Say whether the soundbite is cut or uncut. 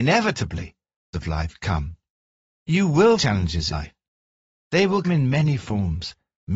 cut